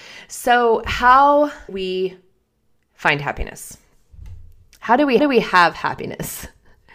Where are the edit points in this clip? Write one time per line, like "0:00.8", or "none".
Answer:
0:01.7
0:05.2